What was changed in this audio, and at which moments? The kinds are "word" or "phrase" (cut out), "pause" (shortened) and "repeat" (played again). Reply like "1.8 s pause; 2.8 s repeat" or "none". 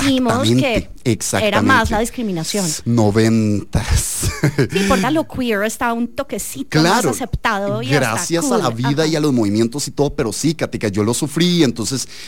5.0 s word